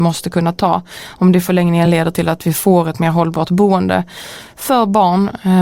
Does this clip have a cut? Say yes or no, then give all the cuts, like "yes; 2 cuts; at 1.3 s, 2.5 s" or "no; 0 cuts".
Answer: no; 0 cuts